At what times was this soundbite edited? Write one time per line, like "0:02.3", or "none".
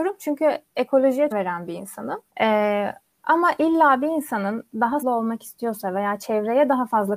0:01.3
0:02.3
0:05.0